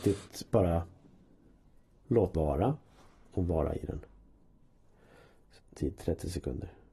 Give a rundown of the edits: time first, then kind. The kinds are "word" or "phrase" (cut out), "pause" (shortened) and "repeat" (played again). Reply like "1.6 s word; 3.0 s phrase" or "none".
2.3 s word; 5.6 s word